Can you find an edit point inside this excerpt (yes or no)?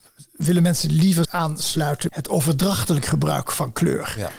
yes